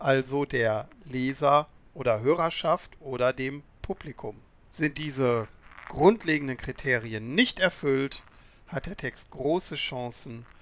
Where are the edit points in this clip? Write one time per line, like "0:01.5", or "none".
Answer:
none